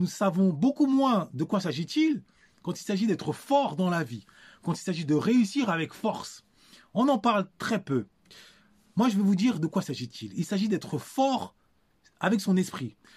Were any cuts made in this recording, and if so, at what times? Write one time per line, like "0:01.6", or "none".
none